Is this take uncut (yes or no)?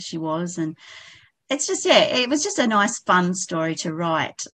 yes